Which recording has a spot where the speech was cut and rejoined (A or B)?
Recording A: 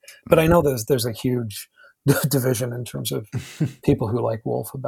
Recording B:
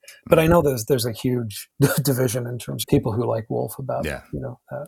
B